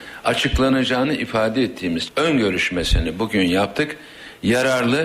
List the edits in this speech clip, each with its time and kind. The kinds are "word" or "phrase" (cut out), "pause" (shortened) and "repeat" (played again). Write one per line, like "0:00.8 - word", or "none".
0:02.0 - word